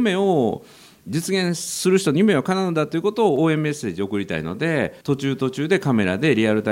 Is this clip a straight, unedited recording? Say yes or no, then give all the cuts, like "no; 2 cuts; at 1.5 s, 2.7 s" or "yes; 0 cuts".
no; 1 cut; at 5.0 s